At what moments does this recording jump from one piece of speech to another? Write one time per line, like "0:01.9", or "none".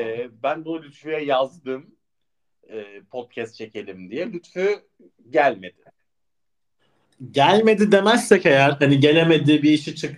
none

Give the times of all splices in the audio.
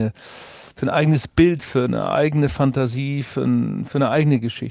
none

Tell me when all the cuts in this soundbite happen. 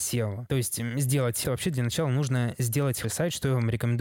0:01.4
0:03.0

